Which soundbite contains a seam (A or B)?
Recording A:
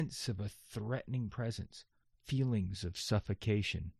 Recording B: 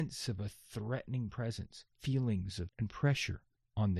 B